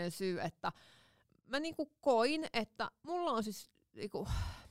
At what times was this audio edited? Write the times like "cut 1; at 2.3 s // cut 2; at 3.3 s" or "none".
none